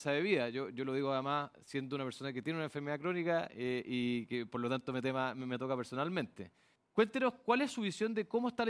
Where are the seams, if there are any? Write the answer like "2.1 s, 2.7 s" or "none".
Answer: 6.8 s